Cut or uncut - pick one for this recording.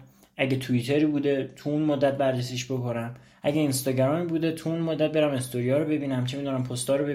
uncut